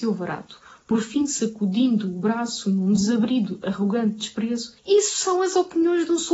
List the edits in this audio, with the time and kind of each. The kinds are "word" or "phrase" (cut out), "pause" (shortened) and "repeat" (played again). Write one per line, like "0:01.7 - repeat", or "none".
0:04.8 - pause

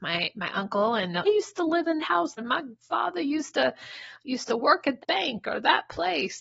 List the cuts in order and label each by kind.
0:01.2 - phrase
0:02.0 - word
0:02.4 - word
0:05.0 - word

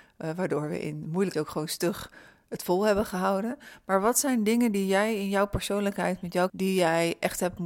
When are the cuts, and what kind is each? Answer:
0:01.3 - word
0:06.5 - word

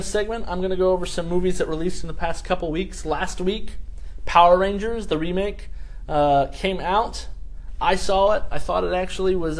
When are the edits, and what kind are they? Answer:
none

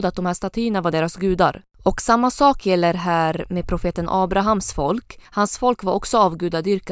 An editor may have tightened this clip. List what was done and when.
0:05.2 - pause

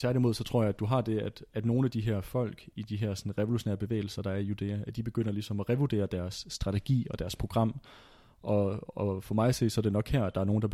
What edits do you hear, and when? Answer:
none

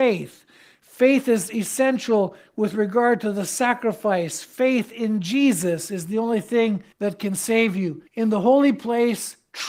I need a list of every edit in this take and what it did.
0:06.9 - pause
0:08.1 - pause

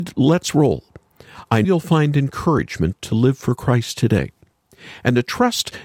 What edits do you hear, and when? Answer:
0:01.6 - word

